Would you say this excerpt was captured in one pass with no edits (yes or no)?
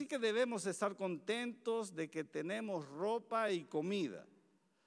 yes